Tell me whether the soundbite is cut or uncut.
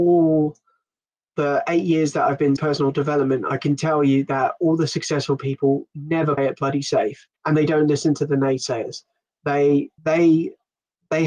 cut